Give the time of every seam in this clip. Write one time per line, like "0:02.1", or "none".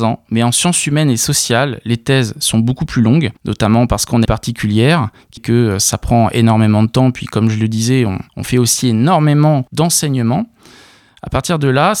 0:03.4
0:04.3
0:05.4
0:08.3
0:09.7